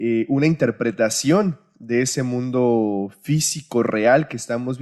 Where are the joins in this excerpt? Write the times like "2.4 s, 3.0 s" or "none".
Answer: none